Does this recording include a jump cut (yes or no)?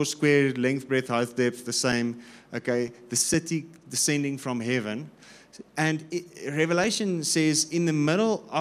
no